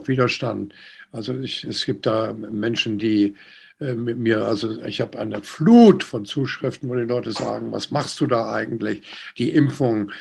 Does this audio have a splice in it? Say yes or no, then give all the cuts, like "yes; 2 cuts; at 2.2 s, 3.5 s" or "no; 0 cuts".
no; 0 cuts